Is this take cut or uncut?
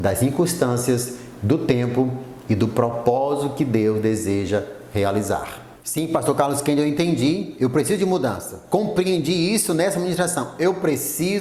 uncut